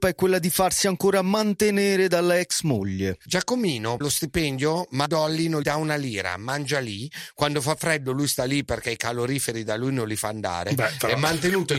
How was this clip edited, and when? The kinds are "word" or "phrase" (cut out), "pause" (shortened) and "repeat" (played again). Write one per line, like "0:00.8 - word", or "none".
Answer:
0:04.0 - word
0:05.1 - word
0:05.6 - word